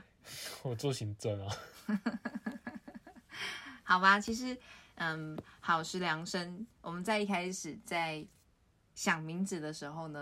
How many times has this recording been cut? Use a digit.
0